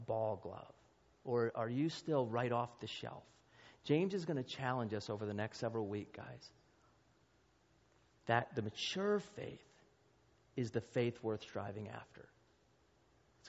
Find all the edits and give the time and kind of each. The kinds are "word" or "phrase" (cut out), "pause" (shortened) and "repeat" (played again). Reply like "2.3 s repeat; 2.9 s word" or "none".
none